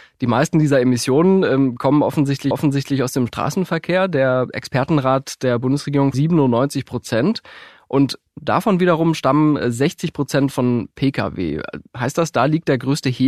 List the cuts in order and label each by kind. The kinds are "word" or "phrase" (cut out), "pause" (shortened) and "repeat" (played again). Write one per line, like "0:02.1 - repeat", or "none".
0:02.5 - repeat
0:06.1 - phrase